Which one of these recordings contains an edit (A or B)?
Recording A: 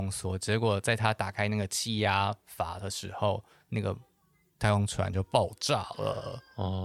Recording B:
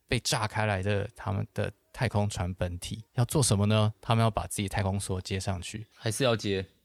B